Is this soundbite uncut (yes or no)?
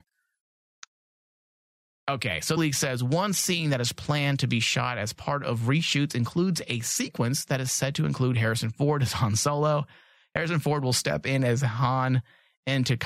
no